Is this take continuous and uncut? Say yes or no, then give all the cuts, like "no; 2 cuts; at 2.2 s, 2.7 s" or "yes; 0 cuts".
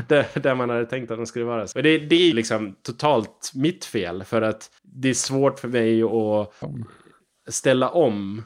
no; 4 cuts; at 1.7 s, 2.3 s, 4.8 s, 6.6 s